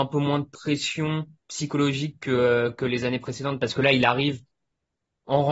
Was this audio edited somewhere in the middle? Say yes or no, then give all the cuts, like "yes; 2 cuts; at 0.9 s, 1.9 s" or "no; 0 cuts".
no; 0 cuts